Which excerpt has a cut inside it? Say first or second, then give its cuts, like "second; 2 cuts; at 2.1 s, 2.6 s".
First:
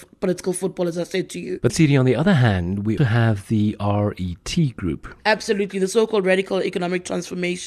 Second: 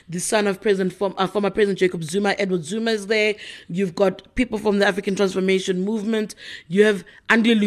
first; 2 cuts; at 1.7 s, 3.0 s